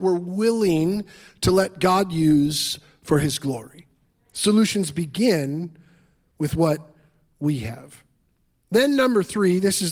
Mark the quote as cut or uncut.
uncut